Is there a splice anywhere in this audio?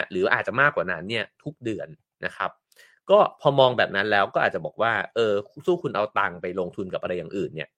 no; 0 cuts

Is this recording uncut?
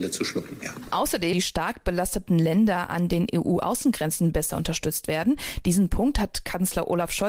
no; 1 cut; at 1.3 s

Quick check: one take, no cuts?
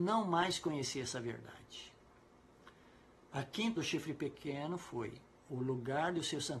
no; 1 cut; at 3.8 s

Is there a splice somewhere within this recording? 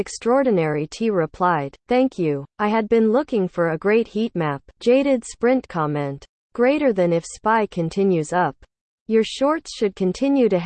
yes; 3 cuts; at 1.8 s, 2.5 s, 4.7 s

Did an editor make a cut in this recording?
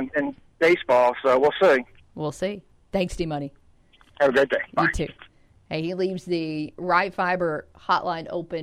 no; 0 cuts

